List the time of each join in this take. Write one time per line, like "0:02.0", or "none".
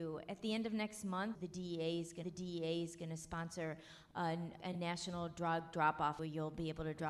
0:01.3
0:02.2
0:04.6
0:06.2

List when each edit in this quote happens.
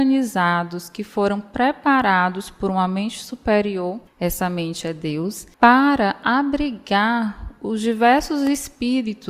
0:04.1
0:05.5

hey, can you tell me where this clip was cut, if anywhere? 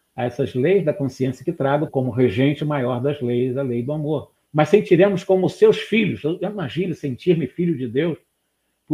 0:01.9
0:04.4

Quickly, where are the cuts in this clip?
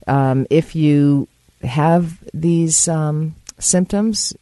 none

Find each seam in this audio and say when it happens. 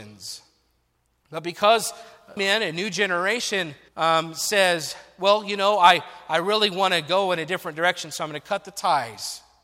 0:02.4
0:03.9

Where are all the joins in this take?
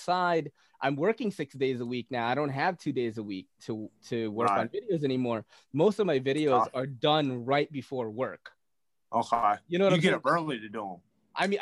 none

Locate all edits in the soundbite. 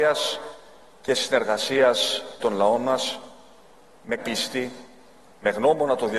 0:02.4
0:04.2

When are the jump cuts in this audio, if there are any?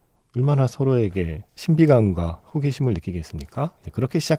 0:01.5

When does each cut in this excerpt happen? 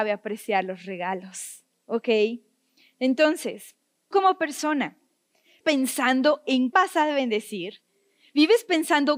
0:04.1
0:05.6
0:06.7

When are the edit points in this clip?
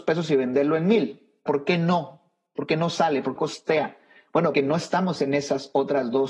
0:01.5
0:03.4
0:04.5

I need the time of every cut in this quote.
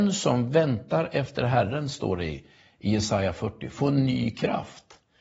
none

